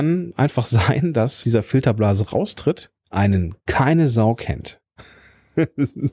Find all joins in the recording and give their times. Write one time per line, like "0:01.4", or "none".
0:01.4
0:03.0